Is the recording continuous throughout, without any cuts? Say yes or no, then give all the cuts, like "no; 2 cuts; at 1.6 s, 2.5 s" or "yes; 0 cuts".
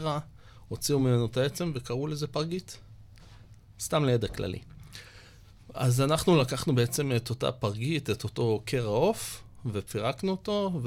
yes; 0 cuts